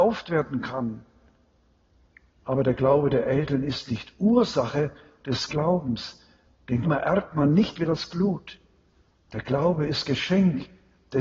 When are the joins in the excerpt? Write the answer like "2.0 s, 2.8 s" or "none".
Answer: 5.5 s, 6.8 s